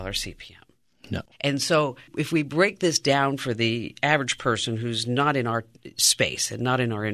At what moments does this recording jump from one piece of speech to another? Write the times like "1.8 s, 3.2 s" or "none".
none